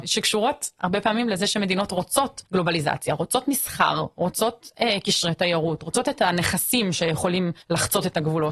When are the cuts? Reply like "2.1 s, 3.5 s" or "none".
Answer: 2.5 s, 7.6 s